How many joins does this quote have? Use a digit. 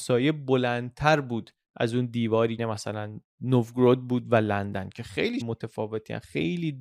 2